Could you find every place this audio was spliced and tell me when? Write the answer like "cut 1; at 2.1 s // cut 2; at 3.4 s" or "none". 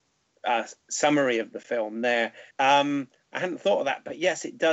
cut 1; at 2.5 s